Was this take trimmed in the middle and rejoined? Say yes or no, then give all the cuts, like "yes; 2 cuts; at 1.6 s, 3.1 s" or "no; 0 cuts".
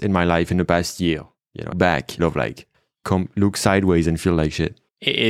yes; 3 cuts; at 1.7 s, 2.2 s, 2.7 s